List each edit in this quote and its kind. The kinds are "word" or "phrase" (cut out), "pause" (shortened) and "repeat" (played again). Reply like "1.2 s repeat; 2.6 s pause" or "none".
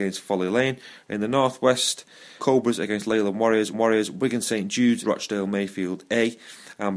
2.4 s phrase; 3.7 s repeat; 5.0 s word